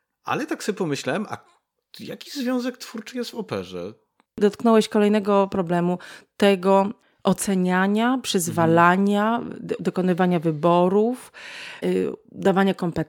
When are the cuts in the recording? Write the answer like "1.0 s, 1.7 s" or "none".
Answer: 11.8 s